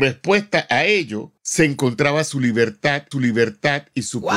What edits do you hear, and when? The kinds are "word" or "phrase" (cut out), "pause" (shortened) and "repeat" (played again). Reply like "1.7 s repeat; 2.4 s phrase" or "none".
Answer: 1.4 s pause; 3.1 s repeat